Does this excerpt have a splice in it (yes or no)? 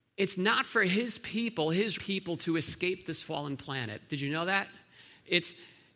yes